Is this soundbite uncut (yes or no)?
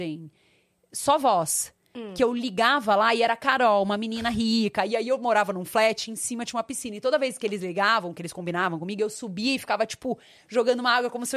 yes